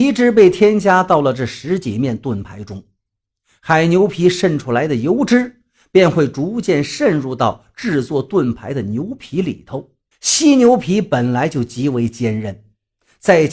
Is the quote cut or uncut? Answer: cut